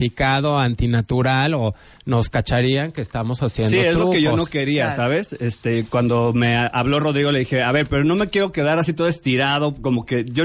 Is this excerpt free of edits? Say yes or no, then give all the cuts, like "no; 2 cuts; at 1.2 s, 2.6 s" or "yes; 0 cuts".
yes; 0 cuts